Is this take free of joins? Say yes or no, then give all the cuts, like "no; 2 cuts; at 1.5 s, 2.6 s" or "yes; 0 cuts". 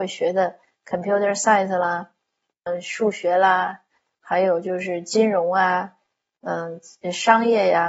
no; 1 cut; at 2.7 s